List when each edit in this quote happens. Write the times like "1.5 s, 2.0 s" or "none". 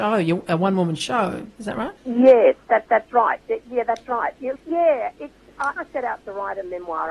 2.0 s, 2.9 s, 4.6 s, 5.8 s